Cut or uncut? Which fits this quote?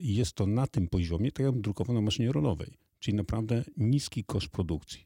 uncut